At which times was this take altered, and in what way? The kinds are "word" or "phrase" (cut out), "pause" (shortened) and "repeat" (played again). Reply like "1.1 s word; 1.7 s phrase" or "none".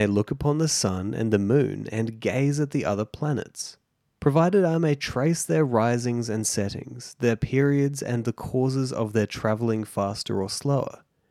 none